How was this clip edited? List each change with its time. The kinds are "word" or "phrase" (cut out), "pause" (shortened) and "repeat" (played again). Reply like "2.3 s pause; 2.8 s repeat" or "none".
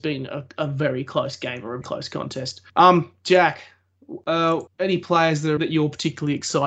1.8 s word; 2.7 s pause; 4.7 s pause; 5.6 s word